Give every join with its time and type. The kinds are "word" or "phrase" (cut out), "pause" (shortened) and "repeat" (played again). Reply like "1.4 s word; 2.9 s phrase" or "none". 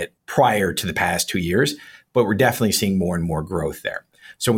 none